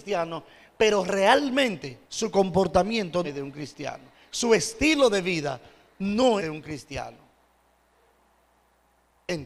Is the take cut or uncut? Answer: cut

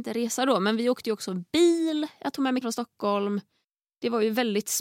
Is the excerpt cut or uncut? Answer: cut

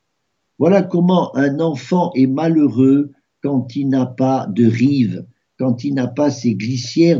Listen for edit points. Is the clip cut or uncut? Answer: uncut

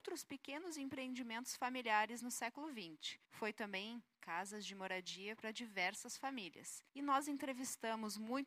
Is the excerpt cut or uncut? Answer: cut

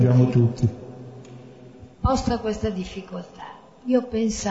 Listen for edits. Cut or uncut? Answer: cut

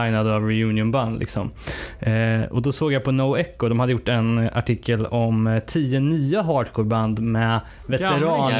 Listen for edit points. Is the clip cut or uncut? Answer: uncut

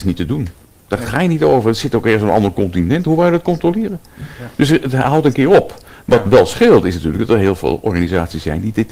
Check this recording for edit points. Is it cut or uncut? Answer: uncut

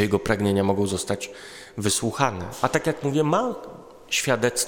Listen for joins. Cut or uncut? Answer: uncut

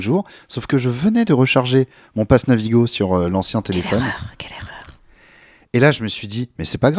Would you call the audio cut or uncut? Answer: uncut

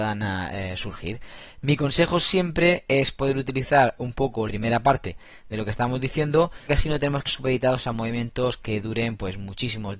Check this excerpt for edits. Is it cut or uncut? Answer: cut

